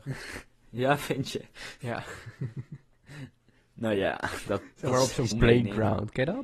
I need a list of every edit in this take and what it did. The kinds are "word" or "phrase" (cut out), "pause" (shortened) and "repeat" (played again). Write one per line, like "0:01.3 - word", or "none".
0:05.3 - word